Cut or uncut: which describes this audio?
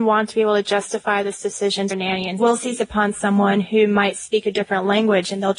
cut